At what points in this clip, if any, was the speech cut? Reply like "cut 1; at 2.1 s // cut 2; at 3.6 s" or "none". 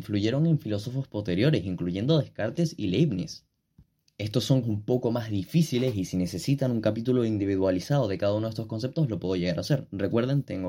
cut 1; at 4.6 s